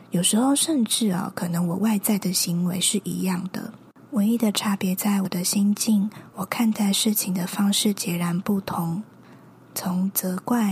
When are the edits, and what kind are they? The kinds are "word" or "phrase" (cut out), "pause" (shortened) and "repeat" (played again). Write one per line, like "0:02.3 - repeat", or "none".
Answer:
none